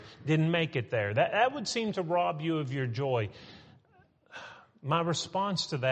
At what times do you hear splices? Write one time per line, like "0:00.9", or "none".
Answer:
none

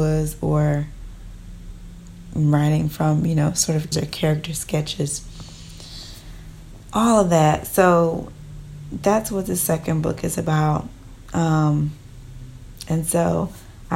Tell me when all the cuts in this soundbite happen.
0:03.9

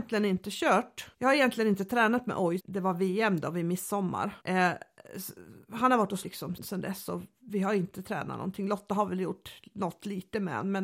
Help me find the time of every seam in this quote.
0:01.1
0:02.6
0:04.4
0:06.2
0:06.6

